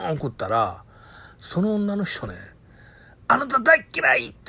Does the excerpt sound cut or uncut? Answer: uncut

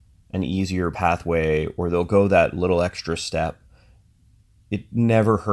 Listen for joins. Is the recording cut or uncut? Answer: uncut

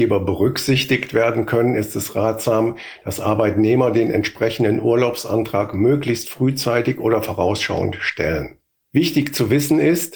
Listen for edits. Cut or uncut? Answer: cut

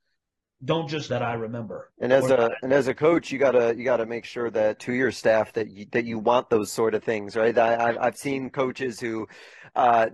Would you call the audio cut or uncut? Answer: cut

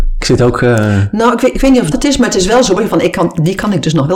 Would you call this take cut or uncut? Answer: cut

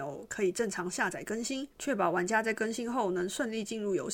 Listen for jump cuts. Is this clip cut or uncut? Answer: cut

